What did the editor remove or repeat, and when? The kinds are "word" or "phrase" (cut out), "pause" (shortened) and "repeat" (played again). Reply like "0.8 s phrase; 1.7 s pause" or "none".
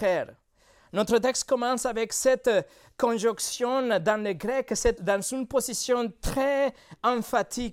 5.0 s word